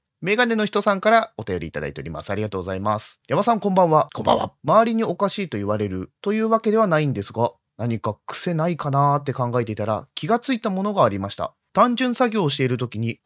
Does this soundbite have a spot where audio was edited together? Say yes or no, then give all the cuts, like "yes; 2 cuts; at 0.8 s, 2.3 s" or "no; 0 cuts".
yes; 1 cut; at 6.2 s